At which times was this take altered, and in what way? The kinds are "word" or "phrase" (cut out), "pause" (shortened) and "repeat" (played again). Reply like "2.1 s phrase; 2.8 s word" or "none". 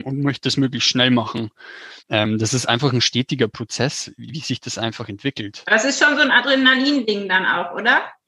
2.0 s pause